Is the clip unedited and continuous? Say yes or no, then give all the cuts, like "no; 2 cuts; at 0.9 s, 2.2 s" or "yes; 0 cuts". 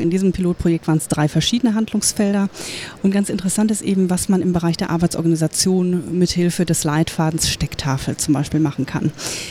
yes; 0 cuts